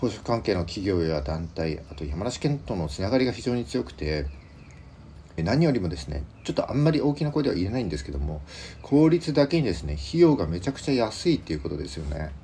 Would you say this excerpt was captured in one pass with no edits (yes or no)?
no